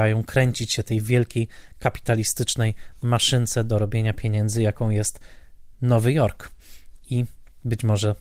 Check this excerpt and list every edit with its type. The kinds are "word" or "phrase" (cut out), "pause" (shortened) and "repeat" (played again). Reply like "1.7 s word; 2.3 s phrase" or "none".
5.7 s pause